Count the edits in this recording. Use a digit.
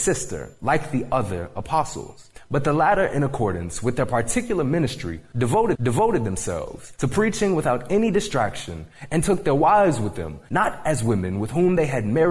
1